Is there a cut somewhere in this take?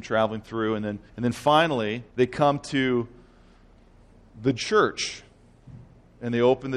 yes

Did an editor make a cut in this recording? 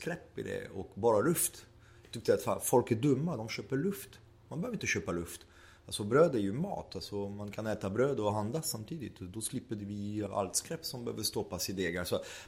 yes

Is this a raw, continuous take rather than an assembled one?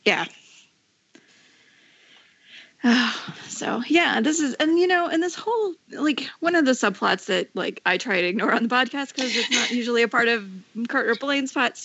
no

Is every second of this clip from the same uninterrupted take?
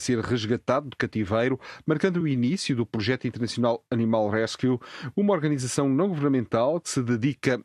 yes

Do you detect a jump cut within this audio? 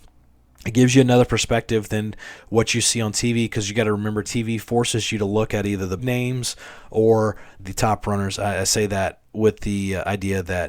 yes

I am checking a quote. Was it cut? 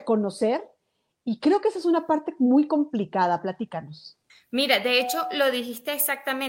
yes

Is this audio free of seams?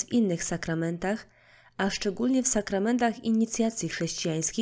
yes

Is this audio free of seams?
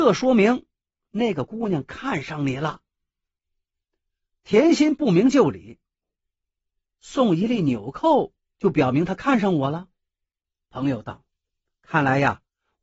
yes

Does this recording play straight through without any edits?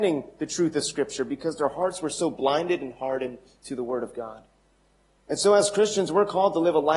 yes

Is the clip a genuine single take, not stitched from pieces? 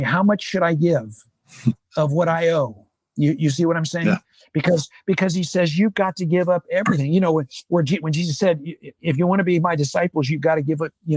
yes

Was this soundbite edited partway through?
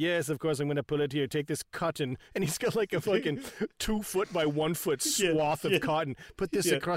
no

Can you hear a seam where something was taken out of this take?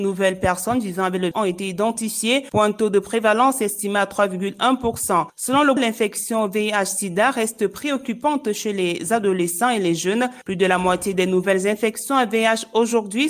yes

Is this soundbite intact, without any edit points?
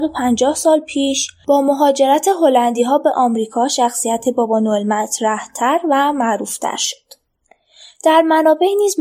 yes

